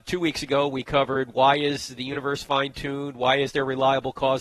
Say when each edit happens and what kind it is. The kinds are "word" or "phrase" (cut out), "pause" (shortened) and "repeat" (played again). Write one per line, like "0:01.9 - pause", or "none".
none